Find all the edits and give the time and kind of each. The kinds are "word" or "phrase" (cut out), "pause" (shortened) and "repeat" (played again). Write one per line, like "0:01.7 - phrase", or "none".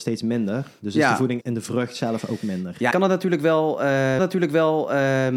0:01.4 - word
0:02.9 - word
0:04.2 - repeat